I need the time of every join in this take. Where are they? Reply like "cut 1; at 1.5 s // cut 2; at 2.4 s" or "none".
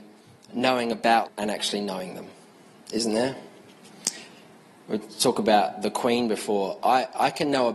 cut 1; at 1.3 s